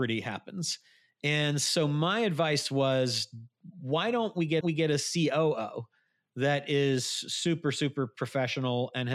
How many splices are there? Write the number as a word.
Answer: one